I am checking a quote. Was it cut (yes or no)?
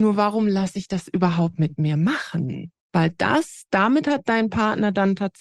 no